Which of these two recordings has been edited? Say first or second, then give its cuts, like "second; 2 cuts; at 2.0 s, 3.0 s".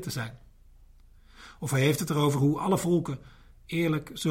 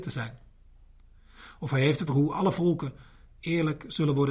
second; 1 cut; at 2.1 s